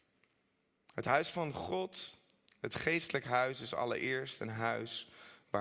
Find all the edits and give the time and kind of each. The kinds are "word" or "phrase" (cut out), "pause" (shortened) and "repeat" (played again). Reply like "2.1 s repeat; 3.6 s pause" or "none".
none

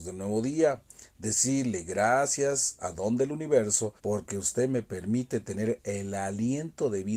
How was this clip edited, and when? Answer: 4.0 s pause

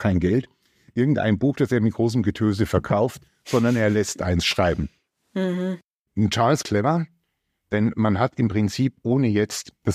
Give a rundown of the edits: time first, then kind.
6.6 s phrase

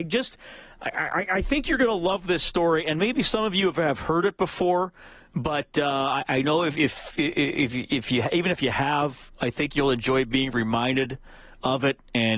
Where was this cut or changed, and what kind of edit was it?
none

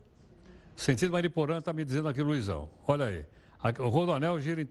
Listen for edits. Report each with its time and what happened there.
none

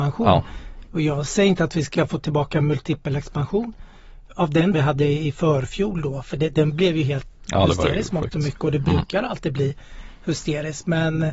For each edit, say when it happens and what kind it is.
4.7 s phrase

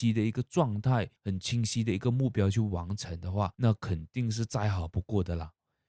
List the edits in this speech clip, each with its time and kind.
1.2 s pause; 3.5 s pause

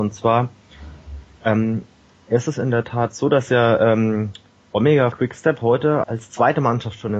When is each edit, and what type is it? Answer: 5.1 s word; 6.0 s word

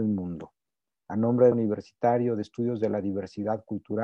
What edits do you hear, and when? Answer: 1.5 s phrase

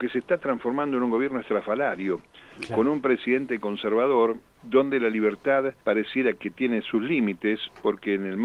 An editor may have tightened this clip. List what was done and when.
4.5 s pause; 5.8 s pause

